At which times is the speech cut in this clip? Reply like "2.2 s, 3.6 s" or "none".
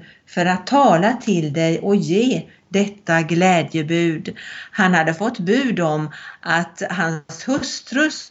none